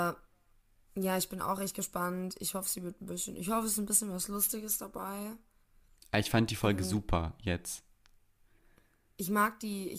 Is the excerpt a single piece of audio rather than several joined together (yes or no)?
yes